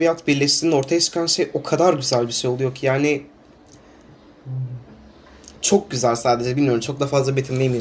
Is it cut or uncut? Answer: cut